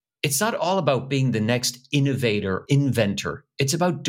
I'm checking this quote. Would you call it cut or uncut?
cut